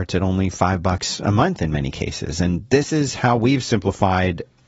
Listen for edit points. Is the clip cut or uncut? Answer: uncut